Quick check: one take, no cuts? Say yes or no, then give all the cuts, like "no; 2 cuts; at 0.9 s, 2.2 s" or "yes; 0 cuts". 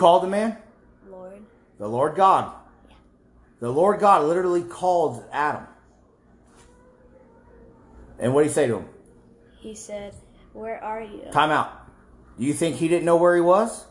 yes; 0 cuts